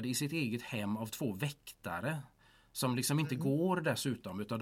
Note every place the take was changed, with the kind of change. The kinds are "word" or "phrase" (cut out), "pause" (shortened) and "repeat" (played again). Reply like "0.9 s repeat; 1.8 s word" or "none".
none